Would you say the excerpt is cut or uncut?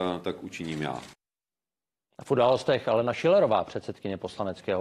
uncut